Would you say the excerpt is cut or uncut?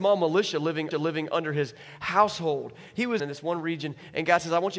cut